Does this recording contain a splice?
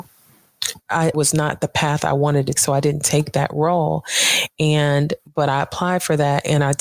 yes; 3 cuts; at 1.1 s, 2.6 s, 5.2 s

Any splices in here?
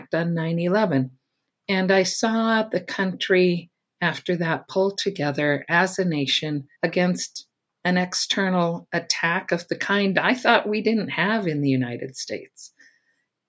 yes; 1 cut; at 6.7 s

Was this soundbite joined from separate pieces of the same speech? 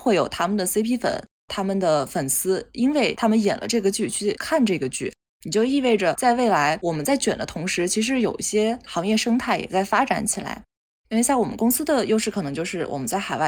no; 0 cuts

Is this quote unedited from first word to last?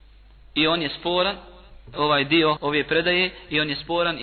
no; 2 cuts; at 1.9 s, 2.6 s

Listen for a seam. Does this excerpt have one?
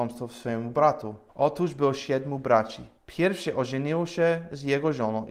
yes; 2 cuts; at 1.3 s, 3.0 s

